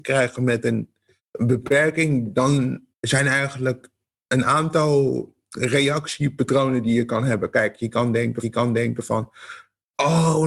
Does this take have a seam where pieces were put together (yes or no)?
yes